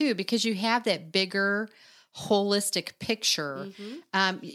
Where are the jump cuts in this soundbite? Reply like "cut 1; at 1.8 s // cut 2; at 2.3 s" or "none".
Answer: none